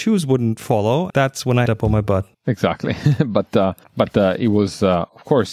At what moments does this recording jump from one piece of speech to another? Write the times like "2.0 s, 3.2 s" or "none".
1.1 s, 1.7 s, 2.3 s, 3.8 s